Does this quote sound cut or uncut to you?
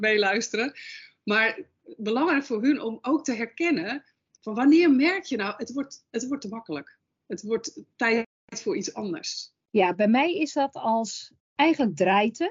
uncut